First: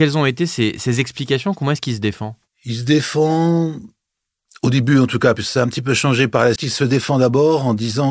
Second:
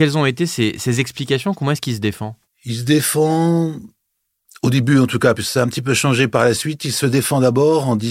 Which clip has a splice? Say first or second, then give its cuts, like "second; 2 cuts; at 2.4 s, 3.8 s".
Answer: first; 1 cut; at 6.6 s